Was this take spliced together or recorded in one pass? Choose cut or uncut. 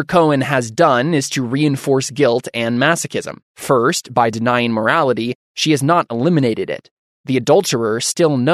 cut